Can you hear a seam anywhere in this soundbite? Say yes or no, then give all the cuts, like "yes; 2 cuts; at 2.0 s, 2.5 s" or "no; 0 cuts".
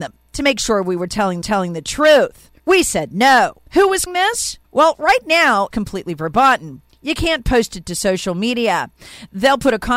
yes; 6 cuts; at 1.4 s, 2.6 s, 3.7 s, 4.1 s, 4.6 s, 5.7 s